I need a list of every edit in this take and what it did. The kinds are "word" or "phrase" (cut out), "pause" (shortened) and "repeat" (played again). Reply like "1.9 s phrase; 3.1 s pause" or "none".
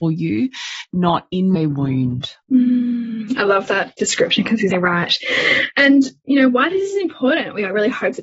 1.6 s phrase; 2.4 s pause; 4.7 s word